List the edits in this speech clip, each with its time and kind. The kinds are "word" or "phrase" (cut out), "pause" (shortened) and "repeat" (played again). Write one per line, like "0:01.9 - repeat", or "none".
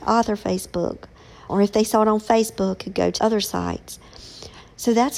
0:01.5 - word
0:02.8 - word
0:03.2 - word